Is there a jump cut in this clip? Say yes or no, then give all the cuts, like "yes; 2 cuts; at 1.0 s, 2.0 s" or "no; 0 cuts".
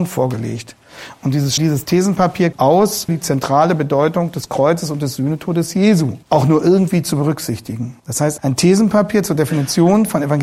yes; 6 cuts; at 1.6 s, 2.5 s, 3.1 s, 6.2 s, 8.0 s, 8.4 s